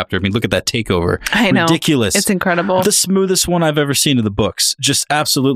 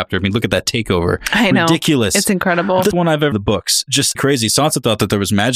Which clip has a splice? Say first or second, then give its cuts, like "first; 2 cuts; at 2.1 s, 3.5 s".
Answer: second; 3 cuts; at 2.9 s, 3.3 s, 4.2 s